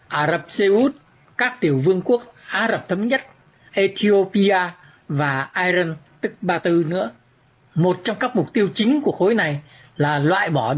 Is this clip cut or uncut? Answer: uncut